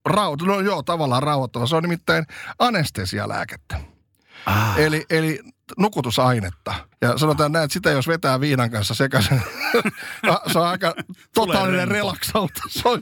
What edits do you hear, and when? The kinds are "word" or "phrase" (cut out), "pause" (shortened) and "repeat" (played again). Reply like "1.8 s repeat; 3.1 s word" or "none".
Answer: 6.9 s pause